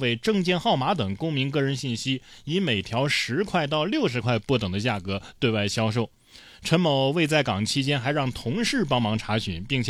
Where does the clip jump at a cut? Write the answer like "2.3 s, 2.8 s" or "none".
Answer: none